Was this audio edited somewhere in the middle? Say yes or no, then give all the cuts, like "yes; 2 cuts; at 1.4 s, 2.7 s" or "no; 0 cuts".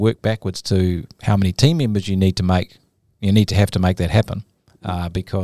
no; 0 cuts